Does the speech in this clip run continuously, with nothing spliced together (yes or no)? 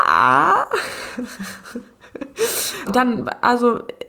no